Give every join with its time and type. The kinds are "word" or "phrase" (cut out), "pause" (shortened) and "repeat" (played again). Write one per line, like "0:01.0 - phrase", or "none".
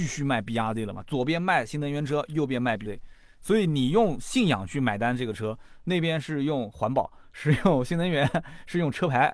0:02.9 - word